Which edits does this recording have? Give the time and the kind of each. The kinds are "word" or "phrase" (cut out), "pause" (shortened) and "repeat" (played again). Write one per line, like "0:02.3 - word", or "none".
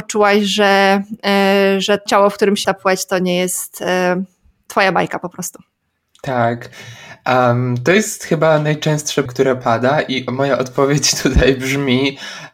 0:02.1 - word
0:02.6 - word
0:05.8 - pause
0:09.3 - word